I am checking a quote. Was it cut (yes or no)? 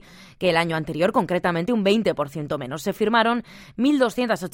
no